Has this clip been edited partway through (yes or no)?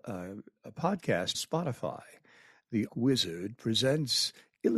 yes